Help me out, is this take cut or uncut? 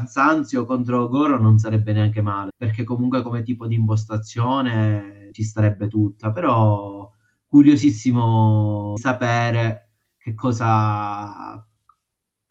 cut